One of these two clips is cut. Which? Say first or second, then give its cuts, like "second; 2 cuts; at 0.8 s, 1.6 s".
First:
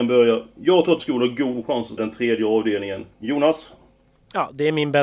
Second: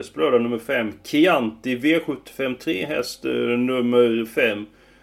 first; 3 cuts; at 1.0 s, 2.0 s, 3.1 s